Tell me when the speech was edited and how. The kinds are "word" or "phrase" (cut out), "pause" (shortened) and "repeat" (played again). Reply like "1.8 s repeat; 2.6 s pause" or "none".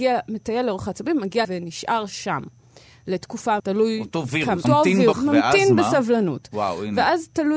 1.4 s word; 3.6 s word; 4.6 s word; 5.1 s word